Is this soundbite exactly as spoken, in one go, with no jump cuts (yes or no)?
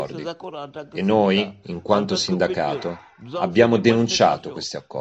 yes